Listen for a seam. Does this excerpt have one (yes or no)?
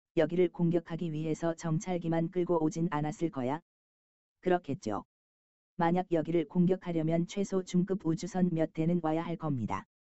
no